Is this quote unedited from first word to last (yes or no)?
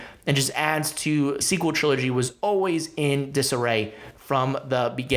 no